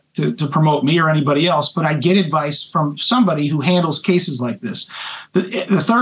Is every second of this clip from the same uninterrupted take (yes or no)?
yes